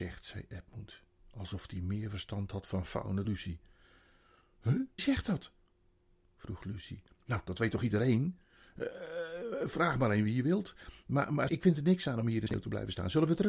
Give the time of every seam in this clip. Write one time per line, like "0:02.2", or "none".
0:03.2
0:05.0
0:11.5